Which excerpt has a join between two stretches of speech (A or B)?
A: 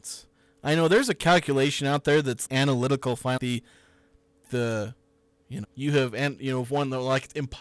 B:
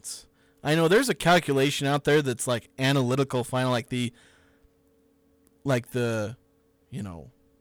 A